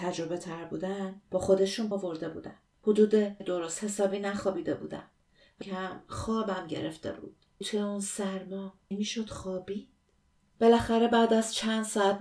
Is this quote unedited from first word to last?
no; 7 cuts; at 1.2 s, 1.9 s, 3.4 s, 5.6 s, 7.6 s, 8.9 s, 10.3 s

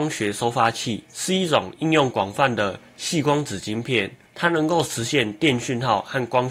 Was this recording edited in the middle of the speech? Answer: yes; 2 cuts; at 1.1 s, 4.3 s

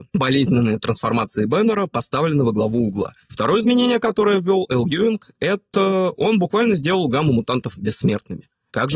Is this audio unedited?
yes; 0 cuts

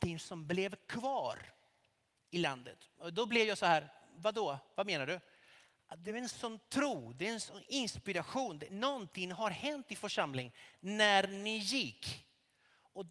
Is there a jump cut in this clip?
no; 0 cuts

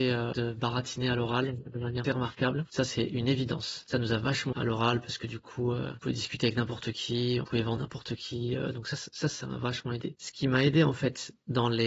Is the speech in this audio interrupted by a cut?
yes; 4 cuts; at 2.0 s, 4.5 s, 7.4 s, 7.8 s

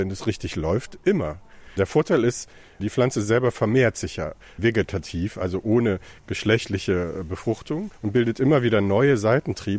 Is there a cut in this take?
yes; 1 cut; at 7.9 s

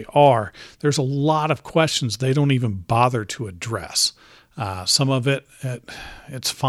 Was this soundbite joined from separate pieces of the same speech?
no; 0 cuts

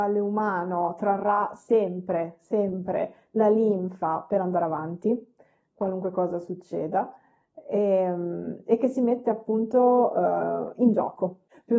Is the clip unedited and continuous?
yes; 0 cuts

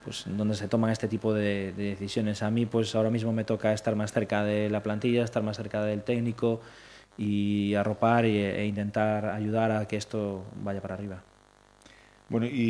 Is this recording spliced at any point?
no; 0 cuts

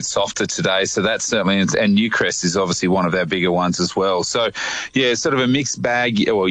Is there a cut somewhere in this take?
no; 0 cuts

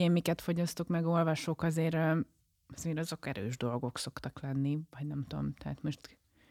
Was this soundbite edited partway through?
no; 0 cuts

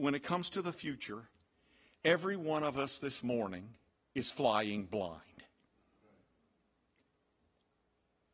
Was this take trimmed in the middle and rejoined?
no; 0 cuts

